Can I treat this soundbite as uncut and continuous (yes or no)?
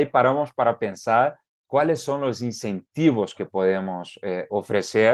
yes